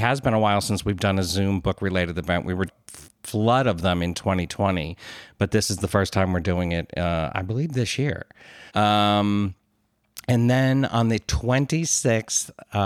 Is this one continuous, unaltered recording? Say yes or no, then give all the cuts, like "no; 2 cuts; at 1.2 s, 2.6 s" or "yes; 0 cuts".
no; 2 cuts; at 2.7 s, 8.7 s